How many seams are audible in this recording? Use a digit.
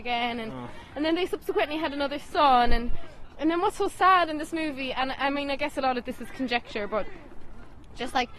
0